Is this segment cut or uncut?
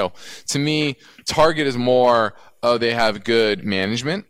uncut